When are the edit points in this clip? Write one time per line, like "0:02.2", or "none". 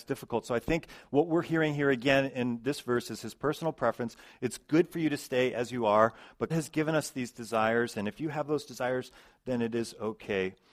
0:06.5